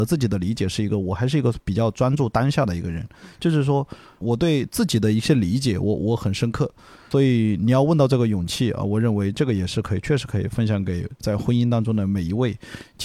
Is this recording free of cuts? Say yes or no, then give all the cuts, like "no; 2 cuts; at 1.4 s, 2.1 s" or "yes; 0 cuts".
yes; 0 cuts